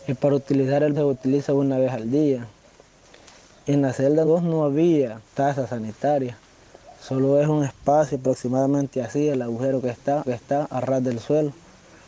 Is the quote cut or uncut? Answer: cut